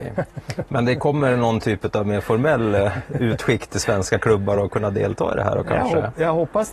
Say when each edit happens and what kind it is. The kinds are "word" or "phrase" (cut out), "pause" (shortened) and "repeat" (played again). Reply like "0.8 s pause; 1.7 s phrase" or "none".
none

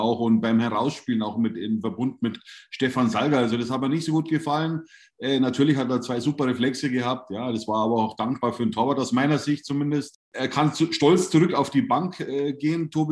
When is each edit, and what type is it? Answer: none

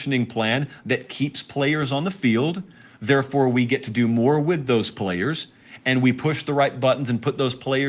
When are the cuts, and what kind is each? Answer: none

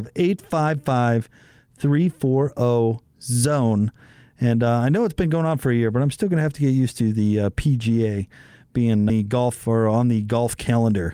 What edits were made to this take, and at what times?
9.1 s phrase

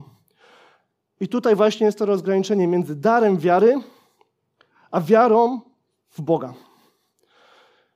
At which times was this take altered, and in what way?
none

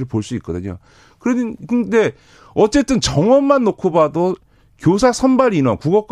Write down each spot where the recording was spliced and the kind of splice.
none

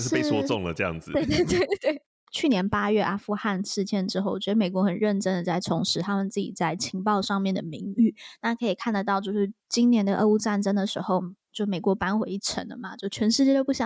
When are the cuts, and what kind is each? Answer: 2.0 s pause

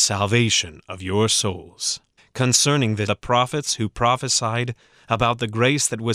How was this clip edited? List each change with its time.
2.2 s pause; 3.1 s word

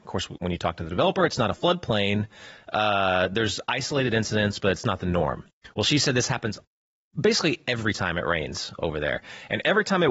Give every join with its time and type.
none

